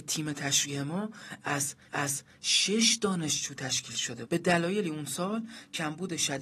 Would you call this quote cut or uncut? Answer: cut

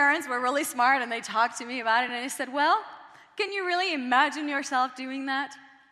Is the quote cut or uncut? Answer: uncut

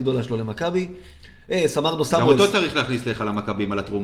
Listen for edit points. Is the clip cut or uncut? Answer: uncut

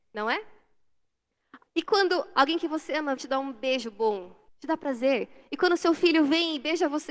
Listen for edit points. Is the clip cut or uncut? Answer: cut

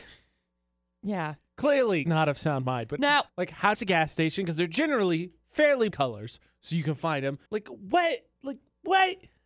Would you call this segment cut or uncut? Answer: cut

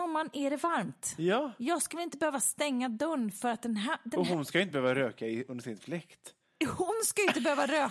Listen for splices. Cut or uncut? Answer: uncut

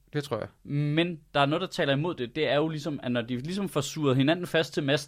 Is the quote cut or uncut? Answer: uncut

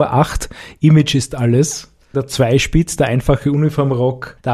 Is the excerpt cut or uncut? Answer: uncut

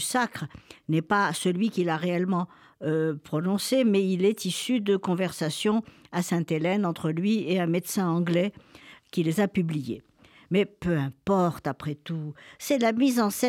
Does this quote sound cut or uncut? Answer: uncut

